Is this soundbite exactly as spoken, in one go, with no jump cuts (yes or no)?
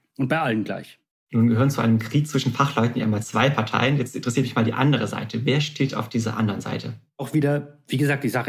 yes